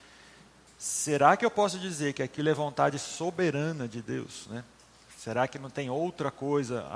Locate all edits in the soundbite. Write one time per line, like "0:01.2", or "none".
none